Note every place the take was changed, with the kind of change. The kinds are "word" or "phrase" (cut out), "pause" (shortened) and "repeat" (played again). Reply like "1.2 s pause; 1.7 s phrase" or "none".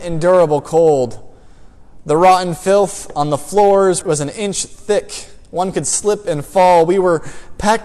4.0 s phrase